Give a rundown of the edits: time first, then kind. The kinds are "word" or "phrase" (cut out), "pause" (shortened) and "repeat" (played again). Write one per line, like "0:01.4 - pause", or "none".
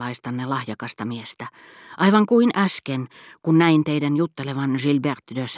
none